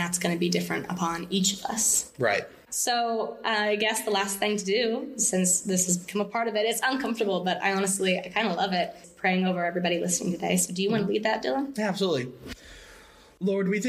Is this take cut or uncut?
cut